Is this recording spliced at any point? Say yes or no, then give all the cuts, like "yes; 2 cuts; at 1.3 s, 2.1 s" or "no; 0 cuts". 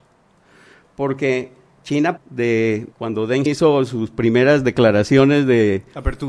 yes; 3 cuts; at 2.2 s, 2.9 s, 3.5 s